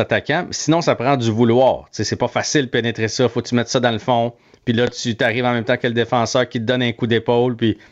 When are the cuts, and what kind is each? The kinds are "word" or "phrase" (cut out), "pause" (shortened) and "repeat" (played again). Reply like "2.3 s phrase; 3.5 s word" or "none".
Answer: none